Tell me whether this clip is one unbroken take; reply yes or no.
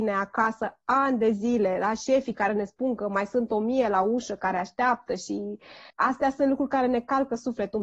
no